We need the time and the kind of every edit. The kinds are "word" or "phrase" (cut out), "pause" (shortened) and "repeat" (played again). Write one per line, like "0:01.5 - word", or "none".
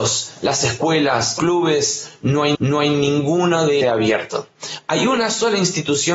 0:01.4 - phrase
0:02.5 - repeat
0:03.8 - phrase